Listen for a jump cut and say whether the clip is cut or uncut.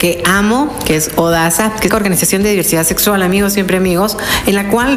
cut